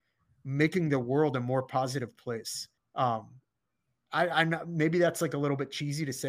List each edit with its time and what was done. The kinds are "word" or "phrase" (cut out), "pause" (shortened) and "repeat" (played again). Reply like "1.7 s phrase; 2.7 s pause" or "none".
2.8 s pause